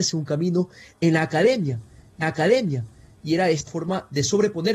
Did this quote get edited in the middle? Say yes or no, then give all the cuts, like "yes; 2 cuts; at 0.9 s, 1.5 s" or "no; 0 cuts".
yes; 2 cuts; at 2.2 s, 3.7 s